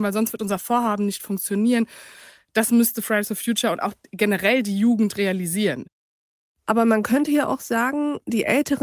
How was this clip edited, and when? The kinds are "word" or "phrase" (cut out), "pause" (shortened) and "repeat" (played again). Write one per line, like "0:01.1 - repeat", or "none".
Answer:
none